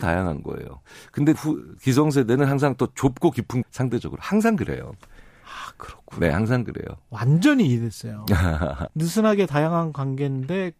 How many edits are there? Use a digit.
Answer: 3